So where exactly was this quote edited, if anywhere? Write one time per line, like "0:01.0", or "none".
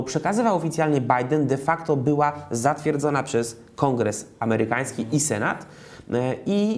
none